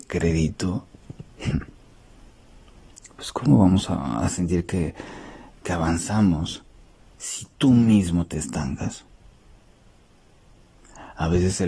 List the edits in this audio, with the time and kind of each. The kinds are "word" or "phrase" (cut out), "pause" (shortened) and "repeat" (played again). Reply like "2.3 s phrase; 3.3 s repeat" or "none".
none